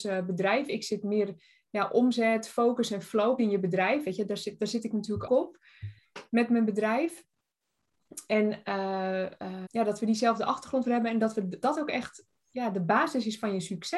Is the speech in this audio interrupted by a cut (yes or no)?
yes